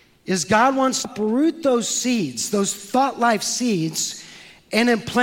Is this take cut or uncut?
cut